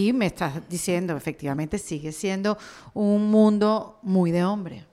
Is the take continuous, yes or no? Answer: yes